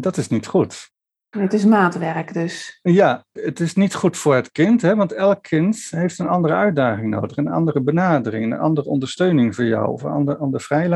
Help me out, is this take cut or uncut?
uncut